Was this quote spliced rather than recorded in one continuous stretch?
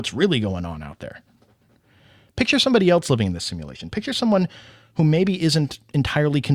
no; 0 cuts

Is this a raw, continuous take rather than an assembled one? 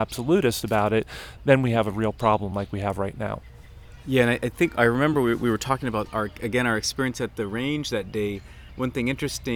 yes; 0 cuts

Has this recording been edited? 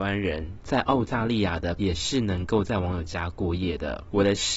yes; 1 cut; at 1.8 s

